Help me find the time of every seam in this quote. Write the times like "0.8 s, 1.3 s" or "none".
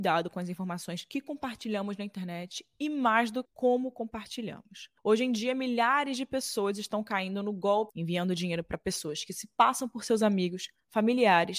3.4 s, 5.0 s, 7.9 s